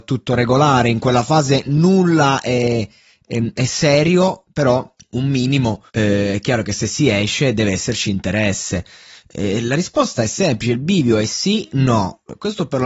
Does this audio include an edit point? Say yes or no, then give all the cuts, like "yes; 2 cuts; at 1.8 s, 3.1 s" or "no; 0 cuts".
yes; 2 cuts; at 5.0 s, 5.9 s